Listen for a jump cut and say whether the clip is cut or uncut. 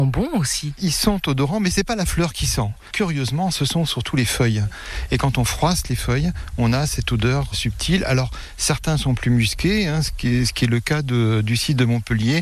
cut